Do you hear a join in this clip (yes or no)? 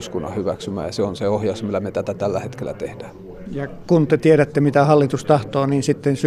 no